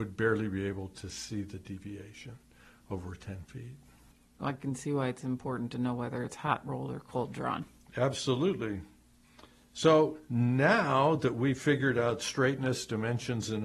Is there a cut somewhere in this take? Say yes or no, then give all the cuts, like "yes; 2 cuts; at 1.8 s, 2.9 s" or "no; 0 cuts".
no; 0 cuts